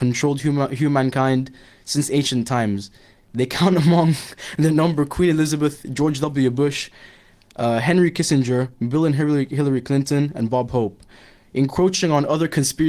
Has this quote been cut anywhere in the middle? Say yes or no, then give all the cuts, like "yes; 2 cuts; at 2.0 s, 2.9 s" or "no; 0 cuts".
no; 0 cuts